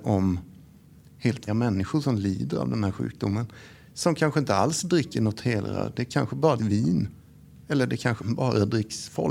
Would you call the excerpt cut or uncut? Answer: cut